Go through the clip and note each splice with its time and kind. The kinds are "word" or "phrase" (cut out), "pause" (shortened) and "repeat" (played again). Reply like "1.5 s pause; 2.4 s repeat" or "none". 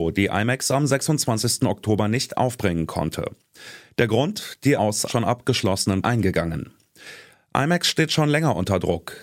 4.8 s word; 5.1 s word; 6.0 s phrase